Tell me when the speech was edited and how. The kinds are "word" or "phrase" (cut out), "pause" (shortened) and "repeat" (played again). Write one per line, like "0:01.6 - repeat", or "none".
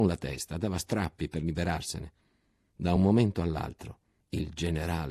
none